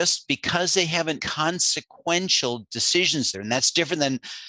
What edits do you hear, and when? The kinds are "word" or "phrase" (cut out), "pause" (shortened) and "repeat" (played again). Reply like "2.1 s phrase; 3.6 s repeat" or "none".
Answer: 1.2 s word; 3.3 s word